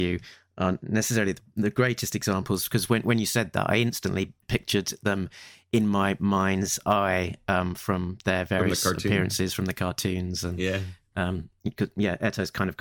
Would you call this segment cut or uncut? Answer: uncut